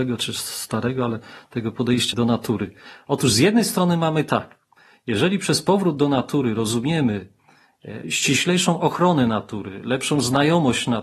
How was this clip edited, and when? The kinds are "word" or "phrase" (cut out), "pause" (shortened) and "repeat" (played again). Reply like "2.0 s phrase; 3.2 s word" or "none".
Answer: 2.1 s word; 8.0 s word